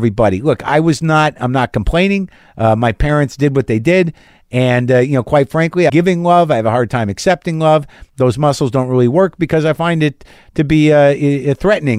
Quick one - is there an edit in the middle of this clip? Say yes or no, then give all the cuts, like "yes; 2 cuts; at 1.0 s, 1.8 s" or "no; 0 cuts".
yes; 1 cut; at 5.9 s